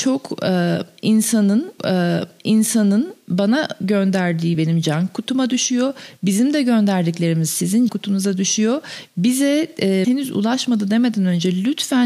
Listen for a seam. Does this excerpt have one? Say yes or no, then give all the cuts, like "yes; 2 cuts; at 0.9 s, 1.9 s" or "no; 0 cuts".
yes; 4 cuts; at 1.8 s, 4.5 s, 7.9 s, 10.0 s